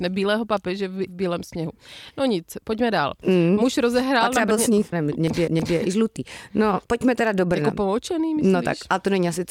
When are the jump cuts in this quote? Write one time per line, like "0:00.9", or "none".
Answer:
0:01.1
0:04.9
0:05.5
0:06.8